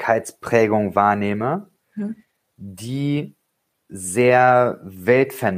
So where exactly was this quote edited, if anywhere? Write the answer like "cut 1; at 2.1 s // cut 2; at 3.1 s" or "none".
none